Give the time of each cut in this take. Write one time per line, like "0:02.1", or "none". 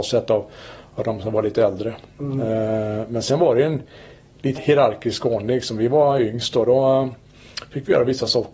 0:04.6